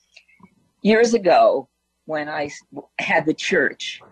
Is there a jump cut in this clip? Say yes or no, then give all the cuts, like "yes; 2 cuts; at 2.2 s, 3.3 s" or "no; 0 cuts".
no; 0 cuts